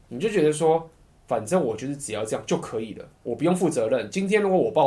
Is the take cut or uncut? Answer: cut